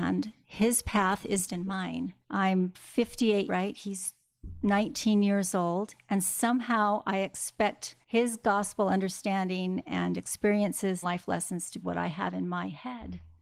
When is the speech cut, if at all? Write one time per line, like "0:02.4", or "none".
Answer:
0:01.5
0:02.2
0:03.5
0:08.0
0:11.0
0:11.8